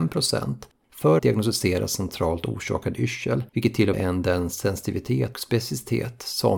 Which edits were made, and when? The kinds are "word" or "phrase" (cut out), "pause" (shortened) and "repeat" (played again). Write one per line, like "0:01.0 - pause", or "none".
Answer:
0:01.2 - word
0:03.5 - pause
0:03.9 - phrase
0:05.3 - word